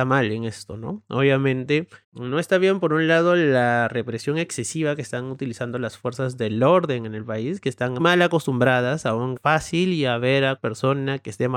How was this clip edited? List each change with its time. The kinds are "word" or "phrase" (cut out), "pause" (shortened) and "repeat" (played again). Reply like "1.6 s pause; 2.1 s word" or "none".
2.0 s pause; 8.0 s word; 9.4 s word; 10.6 s word

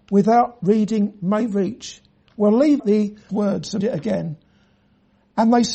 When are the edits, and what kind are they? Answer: 2.8 s word; 3.3 s word; 3.8 s word

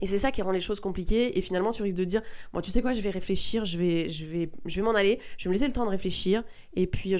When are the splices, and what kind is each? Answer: none

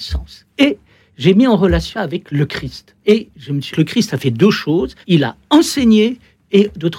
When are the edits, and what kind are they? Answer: 1.9 s word; 3.0 s pause; 3.7 s word; 5.0 s pause

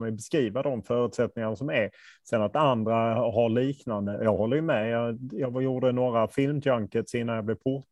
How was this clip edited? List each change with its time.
none

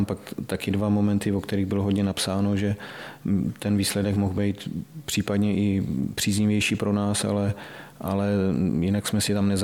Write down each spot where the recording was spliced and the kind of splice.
none

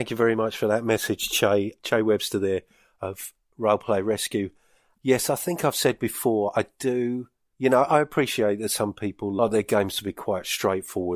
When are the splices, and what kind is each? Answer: none

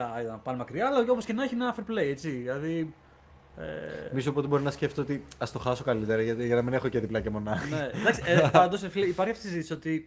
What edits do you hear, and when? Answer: none

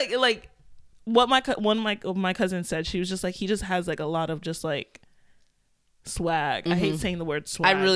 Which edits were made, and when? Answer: none

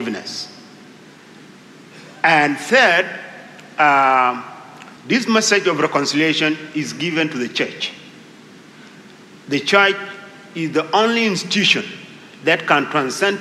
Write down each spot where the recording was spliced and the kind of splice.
5.0 s pause

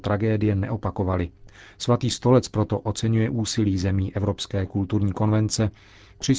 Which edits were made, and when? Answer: none

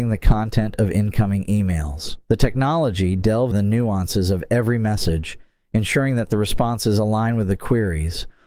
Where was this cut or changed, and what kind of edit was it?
2.2 s pause; 3.5 s word

